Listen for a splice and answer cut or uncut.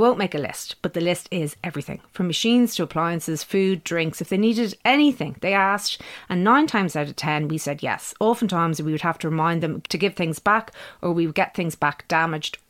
uncut